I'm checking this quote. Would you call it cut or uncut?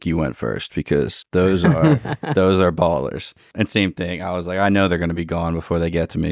uncut